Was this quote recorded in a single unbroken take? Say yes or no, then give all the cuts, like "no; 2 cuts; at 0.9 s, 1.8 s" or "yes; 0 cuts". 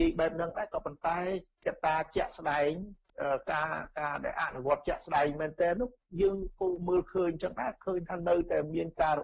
yes; 0 cuts